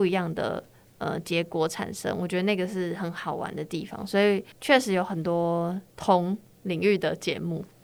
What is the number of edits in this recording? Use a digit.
2